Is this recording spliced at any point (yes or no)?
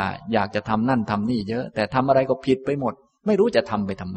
no